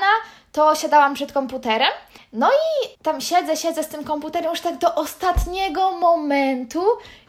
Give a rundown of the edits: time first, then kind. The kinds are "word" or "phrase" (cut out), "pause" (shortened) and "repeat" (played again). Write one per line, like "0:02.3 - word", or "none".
0:02.2 - pause
0:02.9 - pause